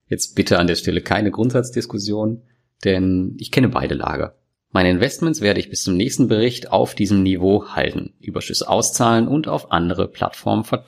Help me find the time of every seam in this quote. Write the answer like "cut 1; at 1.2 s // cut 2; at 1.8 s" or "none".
cut 1; at 4.5 s